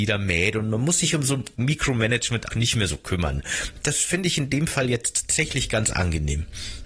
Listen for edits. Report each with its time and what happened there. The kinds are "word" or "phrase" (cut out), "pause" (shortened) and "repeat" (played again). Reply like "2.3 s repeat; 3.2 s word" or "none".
2.5 s word